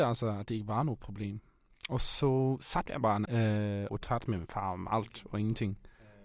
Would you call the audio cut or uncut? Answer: cut